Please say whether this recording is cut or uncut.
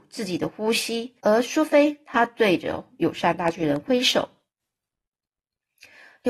cut